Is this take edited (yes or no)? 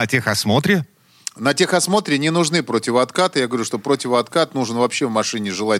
no